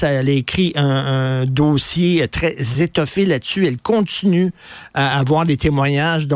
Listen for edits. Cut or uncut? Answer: uncut